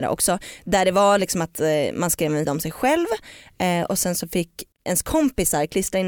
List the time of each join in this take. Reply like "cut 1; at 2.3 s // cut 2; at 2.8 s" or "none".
cut 1; at 2.4 s // cut 2; at 4.8 s